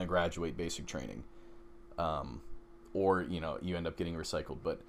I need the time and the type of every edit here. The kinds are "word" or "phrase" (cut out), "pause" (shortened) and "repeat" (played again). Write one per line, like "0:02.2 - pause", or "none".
none